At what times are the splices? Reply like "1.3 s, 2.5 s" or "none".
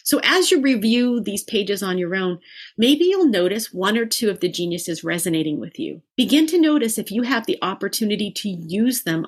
6.1 s